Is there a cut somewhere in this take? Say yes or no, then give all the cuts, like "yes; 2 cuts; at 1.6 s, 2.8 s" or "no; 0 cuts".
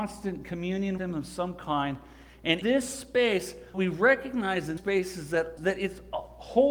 yes; 5 cuts; at 1.0 s, 2.6 s, 3.7 s, 4.8 s, 5.6 s